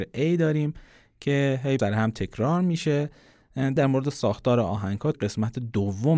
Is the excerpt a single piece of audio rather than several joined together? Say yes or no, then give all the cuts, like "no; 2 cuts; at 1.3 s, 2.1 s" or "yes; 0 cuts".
no; 3 cuts; at 1.8 s, 3.8 s, 5.1 s